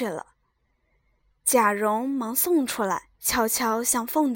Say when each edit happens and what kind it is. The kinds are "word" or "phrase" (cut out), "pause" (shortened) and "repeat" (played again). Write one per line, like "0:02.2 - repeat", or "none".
0:03.1 - pause